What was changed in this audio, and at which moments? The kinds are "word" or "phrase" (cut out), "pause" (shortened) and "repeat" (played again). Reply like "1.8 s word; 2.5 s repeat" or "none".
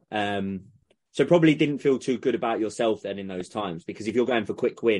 none